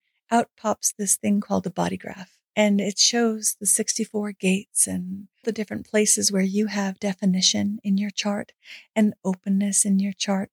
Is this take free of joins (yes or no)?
no